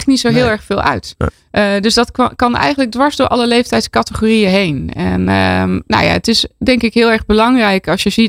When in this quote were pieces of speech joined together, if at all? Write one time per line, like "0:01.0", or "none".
none